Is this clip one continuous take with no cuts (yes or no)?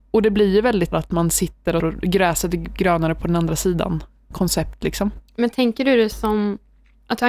no